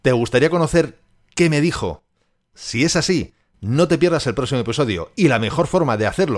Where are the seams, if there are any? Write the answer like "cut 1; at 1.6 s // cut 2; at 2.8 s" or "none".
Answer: none